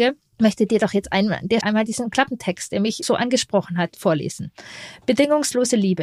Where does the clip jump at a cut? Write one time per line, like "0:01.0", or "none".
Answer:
0:01.6
0:03.0

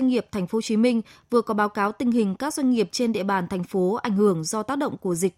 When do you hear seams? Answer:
none

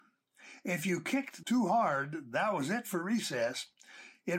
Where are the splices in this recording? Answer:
0:01.4

